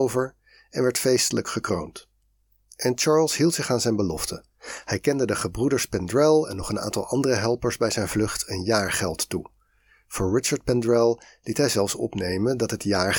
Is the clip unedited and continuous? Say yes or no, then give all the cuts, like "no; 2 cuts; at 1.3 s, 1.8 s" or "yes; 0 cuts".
yes; 0 cuts